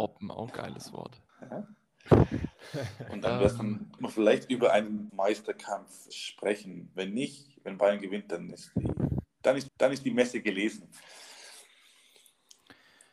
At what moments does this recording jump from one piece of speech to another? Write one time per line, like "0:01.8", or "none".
0:01.3
0:04.0
0:05.1
0:06.1
0:09.7